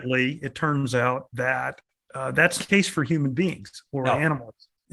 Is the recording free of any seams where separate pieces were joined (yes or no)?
no